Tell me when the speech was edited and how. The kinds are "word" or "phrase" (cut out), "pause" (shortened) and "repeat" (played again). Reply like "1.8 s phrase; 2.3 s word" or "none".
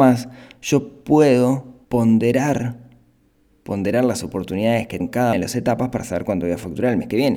1.8 s pause; 5.0 s word; 5.3 s word